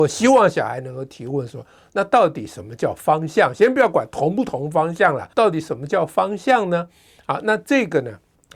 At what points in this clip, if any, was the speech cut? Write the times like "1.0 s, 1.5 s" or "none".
5.3 s

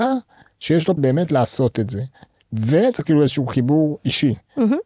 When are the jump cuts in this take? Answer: 1.0 s, 3.0 s

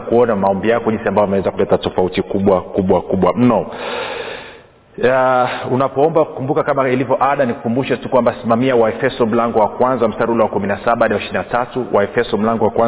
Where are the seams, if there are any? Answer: none

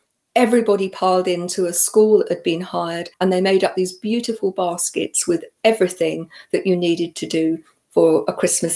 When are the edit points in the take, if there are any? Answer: 3.1 s

